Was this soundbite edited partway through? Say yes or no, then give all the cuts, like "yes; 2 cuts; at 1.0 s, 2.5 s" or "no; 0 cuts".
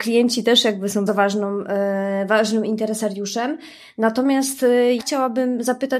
yes; 2 cuts; at 1.1 s, 5.0 s